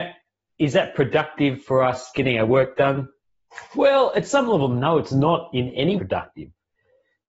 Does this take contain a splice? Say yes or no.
yes